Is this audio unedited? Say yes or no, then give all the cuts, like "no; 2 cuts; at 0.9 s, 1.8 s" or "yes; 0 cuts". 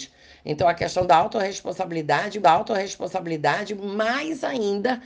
no; 1 cut; at 2.4 s